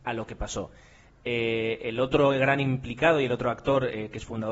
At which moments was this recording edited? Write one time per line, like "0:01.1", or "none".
none